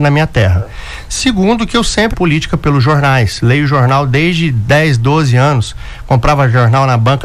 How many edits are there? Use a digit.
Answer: 1